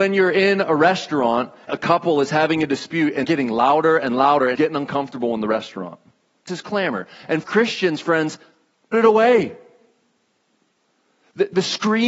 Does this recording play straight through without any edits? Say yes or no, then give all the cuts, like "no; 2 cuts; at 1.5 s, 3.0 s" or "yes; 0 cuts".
no; 6 cuts; at 1.7 s, 3.2 s, 4.5 s, 6.5 s, 7.4 s, 8.9 s